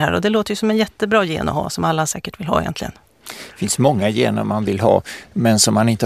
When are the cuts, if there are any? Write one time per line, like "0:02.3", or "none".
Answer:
none

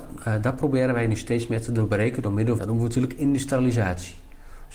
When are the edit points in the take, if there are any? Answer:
0:02.6

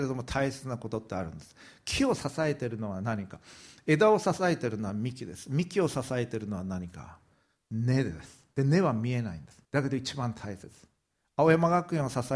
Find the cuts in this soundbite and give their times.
0:09.6

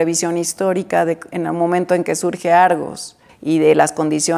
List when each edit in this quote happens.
0:03.3

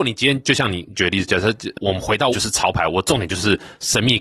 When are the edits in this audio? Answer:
0:02.3

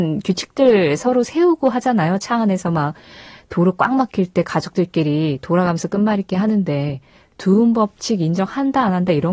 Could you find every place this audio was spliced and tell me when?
none

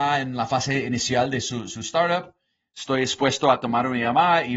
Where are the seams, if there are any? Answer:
none

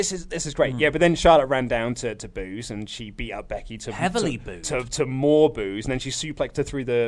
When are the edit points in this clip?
none

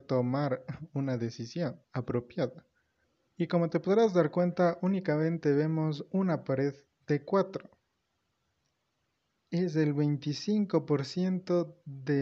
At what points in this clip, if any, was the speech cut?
none

